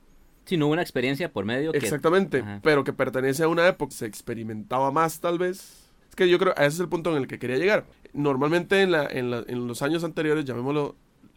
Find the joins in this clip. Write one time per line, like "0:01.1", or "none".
0:03.9
0:06.0
0:07.9